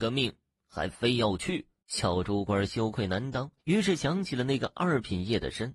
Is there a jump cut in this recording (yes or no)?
yes